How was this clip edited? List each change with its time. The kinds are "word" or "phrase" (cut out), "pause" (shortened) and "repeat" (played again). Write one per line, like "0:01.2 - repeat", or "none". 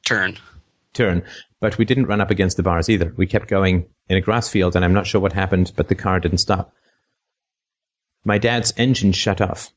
none

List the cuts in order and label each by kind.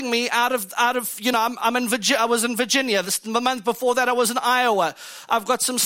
none

